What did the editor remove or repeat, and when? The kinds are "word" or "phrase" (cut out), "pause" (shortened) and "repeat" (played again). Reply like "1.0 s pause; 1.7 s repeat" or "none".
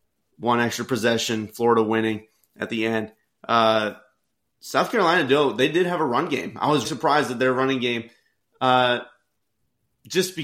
6.8 s word